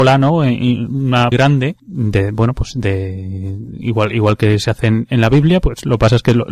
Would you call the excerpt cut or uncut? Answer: cut